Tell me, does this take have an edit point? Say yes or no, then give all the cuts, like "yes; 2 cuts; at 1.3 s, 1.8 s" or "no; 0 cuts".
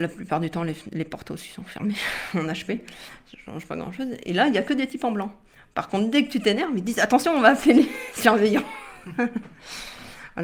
no; 0 cuts